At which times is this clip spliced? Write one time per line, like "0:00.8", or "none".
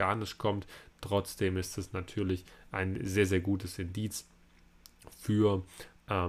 none